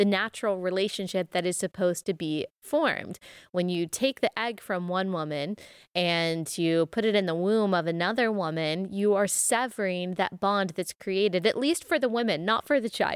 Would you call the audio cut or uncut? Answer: uncut